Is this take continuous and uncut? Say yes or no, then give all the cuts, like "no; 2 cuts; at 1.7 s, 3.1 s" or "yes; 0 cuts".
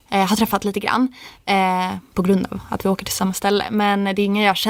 yes; 0 cuts